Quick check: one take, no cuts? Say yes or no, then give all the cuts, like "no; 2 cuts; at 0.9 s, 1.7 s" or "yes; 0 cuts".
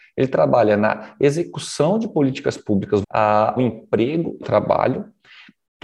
no; 3 cuts; at 3.0 s, 3.6 s, 4.4 s